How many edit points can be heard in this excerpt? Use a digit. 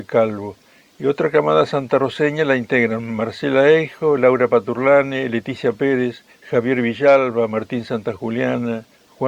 0